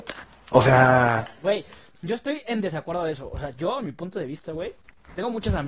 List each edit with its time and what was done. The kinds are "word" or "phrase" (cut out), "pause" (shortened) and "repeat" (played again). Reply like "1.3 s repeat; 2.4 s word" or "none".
none